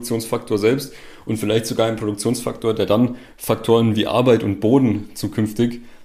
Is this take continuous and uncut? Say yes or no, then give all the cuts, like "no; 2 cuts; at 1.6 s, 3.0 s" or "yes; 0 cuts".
yes; 0 cuts